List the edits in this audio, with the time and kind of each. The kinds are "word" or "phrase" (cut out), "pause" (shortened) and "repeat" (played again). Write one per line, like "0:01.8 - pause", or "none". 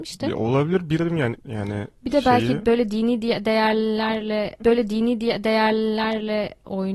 0:01.0 - word
0:01.4 - word
0:04.6 - repeat